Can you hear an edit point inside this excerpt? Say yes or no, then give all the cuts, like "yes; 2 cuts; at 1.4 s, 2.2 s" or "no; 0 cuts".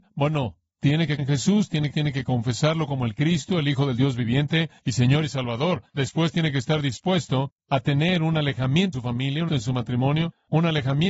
yes; 6 cuts; at 1.2 s, 1.9 s, 4.8 s, 5.9 s, 8.9 s, 9.5 s